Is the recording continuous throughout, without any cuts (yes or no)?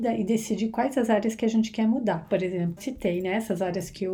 no